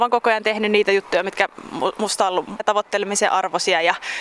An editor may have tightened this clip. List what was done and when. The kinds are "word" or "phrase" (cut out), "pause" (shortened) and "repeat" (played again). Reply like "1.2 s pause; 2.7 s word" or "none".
2.6 s word